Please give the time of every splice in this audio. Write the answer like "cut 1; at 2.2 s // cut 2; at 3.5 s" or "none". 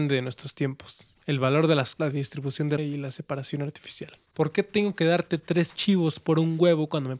cut 1; at 1.2 s // cut 2; at 2.0 s // cut 3; at 2.8 s // cut 4; at 4.3 s